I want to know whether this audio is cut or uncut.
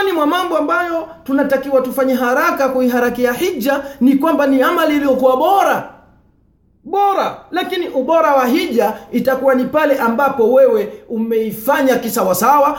uncut